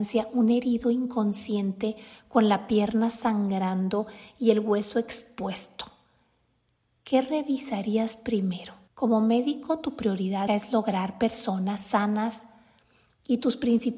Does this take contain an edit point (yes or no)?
yes